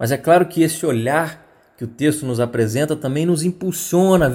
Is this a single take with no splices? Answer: yes; 0 cuts

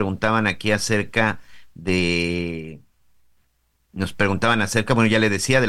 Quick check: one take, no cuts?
yes; 0 cuts

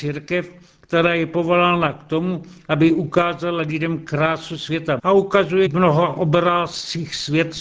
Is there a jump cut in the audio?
yes; 2 cuts; at 5.0 s, 5.7 s

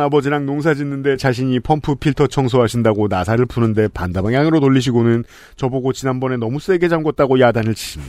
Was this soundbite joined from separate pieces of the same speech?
no; 0 cuts

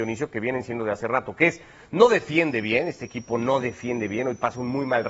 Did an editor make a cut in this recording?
no; 0 cuts

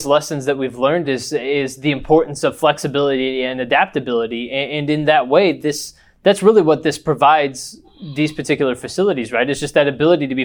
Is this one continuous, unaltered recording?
yes; 0 cuts

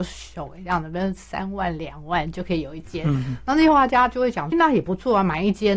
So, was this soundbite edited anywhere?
yes; 1 cut; at 4.5 s

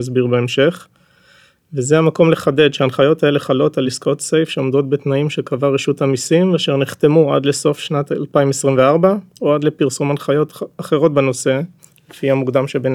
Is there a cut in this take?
no; 0 cuts

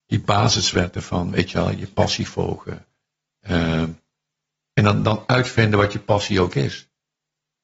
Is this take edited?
no; 0 cuts

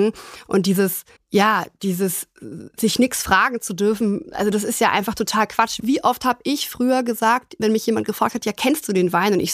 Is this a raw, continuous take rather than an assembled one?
no; 2 cuts; at 1.2 s, 7.6 s

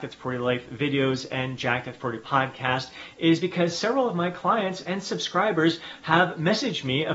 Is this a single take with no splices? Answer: yes; 0 cuts

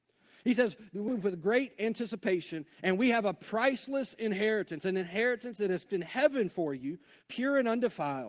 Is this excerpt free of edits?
no; 2 cuts; at 1.1 s, 5.9 s

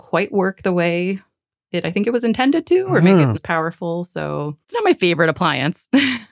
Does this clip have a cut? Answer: yes; 2 cuts; at 3.3 s, 4.6 s

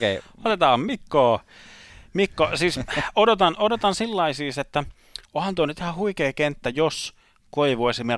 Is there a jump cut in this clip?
no; 0 cuts

